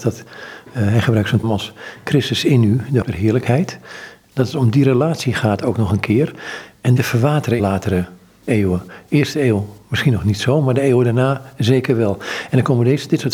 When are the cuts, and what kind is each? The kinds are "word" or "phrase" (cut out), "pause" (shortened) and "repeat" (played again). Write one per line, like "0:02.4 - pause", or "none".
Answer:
0:01.4 - word
0:03.0 - word
0:07.0 - phrase
0:07.6 - phrase